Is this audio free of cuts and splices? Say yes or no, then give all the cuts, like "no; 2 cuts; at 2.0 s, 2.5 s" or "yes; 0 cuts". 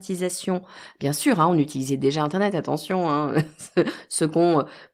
yes; 0 cuts